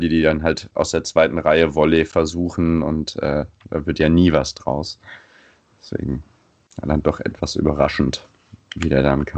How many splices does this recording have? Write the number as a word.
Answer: zero